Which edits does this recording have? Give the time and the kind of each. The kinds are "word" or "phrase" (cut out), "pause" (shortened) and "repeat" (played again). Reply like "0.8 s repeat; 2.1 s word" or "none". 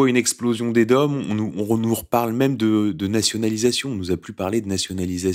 none